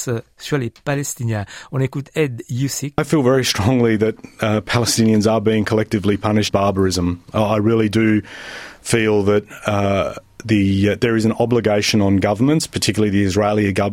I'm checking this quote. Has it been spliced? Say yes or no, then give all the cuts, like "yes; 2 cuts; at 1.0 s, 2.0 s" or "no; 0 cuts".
yes; 2 cuts; at 3.0 s, 6.5 s